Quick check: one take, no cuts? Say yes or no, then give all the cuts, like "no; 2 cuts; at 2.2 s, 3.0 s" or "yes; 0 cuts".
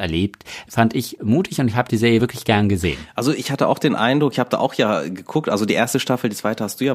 yes; 0 cuts